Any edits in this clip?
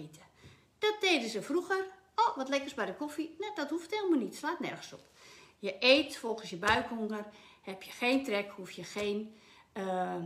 no; 0 cuts

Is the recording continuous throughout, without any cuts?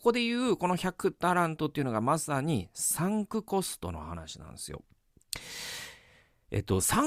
yes; 0 cuts

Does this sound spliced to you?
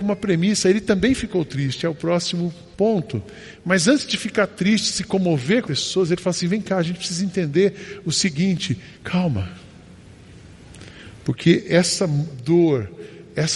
yes; 3 cuts; at 2.7 s, 5.6 s, 8.9 s

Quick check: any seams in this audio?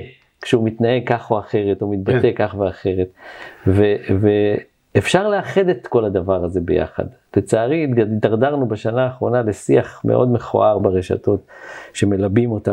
yes; 1 cut; at 10.8 s

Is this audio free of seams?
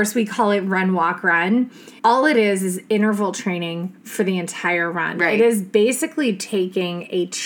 no; 1 cut; at 2.0 s

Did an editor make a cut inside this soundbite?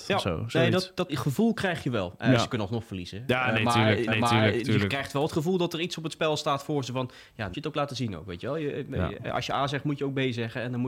yes; 3 cuts; at 1.1 s, 4.1 s, 7.5 s

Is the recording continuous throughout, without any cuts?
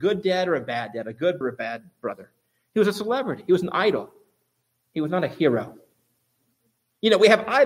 no; 1 cut; at 1.4 s

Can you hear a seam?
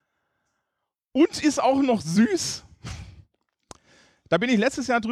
no; 0 cuts

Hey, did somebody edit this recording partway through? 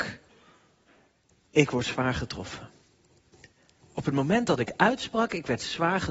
no; 0 cuts

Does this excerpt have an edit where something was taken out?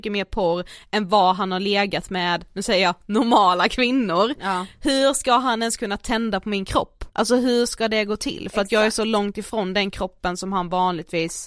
yes; 1 cut; at 7.1 s

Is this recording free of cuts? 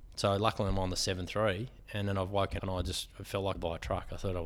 no; 2 cuts; at 2.6 s, 3.5 s

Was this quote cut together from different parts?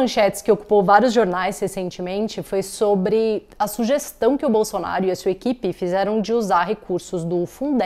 no; 0 cuts

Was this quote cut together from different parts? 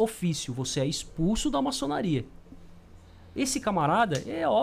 no; 0 cuts

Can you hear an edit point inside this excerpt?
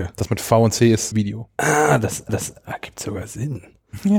yes; 2 cuts; at 1.1 s, 2.3 s

